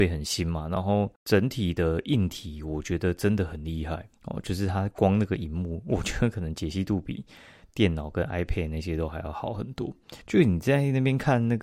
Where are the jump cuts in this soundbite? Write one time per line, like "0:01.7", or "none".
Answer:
0:01.2
0:04.1
0:10.2